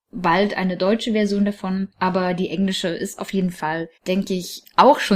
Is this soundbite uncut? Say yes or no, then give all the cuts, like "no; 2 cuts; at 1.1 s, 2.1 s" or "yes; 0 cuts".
no; 2 cuts; at 1.9 s, 4.0 s